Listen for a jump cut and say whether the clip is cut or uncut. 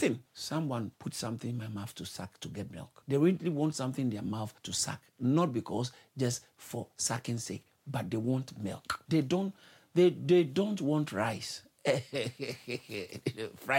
uncut